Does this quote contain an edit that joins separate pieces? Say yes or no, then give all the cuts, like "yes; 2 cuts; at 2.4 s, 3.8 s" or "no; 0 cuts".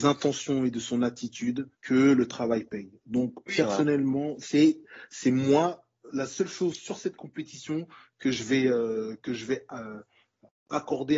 yes; 1 cut; at 1.7 s